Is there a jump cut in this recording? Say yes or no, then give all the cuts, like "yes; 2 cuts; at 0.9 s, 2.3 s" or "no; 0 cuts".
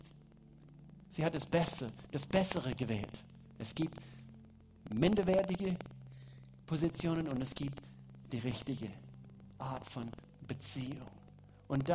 yes; 1 cut; at 6.6 s